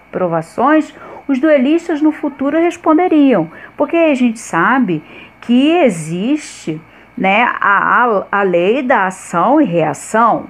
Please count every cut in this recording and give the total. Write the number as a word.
zero